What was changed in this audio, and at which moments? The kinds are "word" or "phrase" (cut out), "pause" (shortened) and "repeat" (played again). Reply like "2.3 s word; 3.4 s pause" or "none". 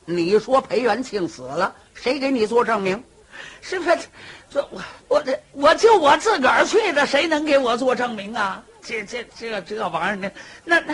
5.0 s pause